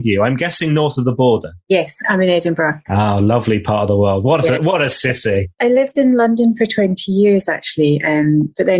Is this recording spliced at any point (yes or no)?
no